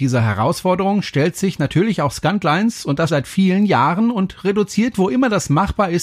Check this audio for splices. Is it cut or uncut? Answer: cut